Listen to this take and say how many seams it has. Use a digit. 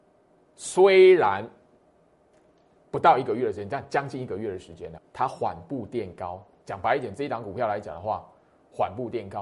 1